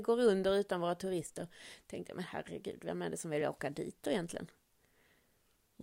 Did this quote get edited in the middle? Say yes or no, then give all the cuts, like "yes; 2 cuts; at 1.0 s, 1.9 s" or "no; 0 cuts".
no; 0 cuts